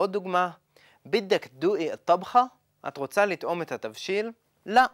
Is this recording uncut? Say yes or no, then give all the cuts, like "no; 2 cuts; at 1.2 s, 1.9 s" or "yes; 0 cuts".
yes; 0 cuts